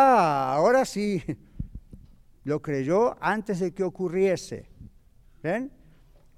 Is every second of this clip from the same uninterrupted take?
yes; 0 cuts

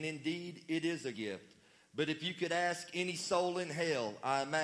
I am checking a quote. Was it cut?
yes; 1 cut; at 1.1 s

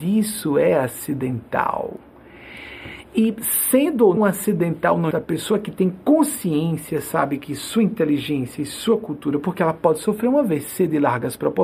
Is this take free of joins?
no; 2 cuts; at 4.2 s, 5.1 s

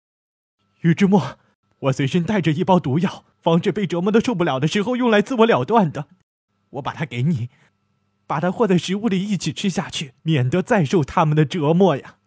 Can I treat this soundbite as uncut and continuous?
no; 4 cuts; at 1.6 s, 3.3 s, 6.5 s, 10.2 s

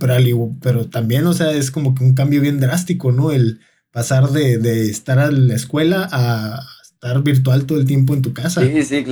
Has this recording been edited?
no; 0 cuts

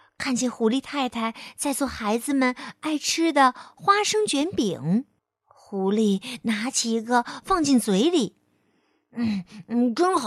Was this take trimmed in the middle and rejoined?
yes; 1 cut; at 5.2 s

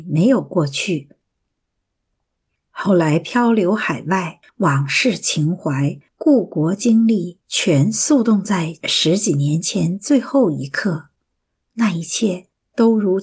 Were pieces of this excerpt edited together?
no; 0 cuts

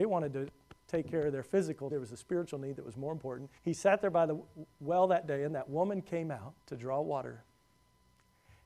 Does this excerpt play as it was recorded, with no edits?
no; 3 cuts; at 1.9 s, 3.6 s, 6.6 s

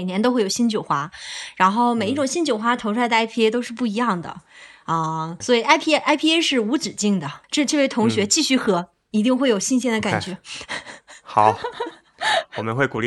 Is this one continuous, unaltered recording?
no; 2 cuts; at 5.4 s, 7.4 s

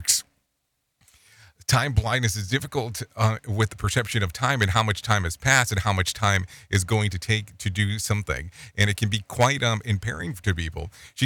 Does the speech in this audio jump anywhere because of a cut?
no; 0 cuts

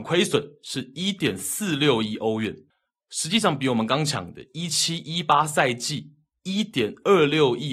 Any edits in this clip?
yes; 1 cut; at 2.7 s

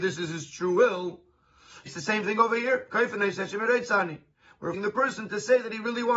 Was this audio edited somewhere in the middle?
yes; 2 cuts; at 1.9 s, 4.7 s

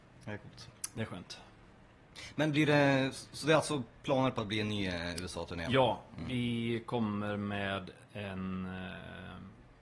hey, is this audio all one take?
yes; 0 cuts

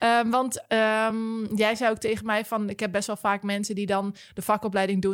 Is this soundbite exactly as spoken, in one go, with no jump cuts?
yes; 0 cuts

